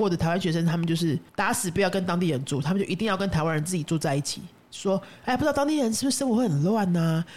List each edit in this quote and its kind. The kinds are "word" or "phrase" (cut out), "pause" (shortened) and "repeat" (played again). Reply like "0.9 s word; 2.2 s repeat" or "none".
1.3 s pause